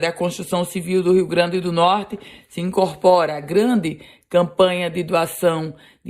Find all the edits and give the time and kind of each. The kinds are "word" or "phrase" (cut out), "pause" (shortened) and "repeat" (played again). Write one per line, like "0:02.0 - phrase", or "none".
none